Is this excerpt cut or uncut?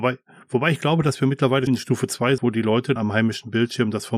cut